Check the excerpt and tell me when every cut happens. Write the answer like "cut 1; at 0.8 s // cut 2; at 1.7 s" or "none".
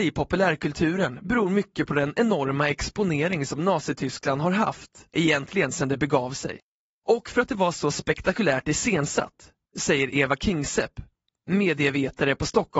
none